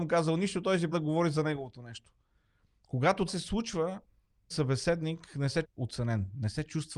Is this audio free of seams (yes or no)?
no